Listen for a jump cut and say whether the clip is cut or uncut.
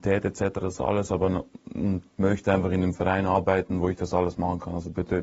cut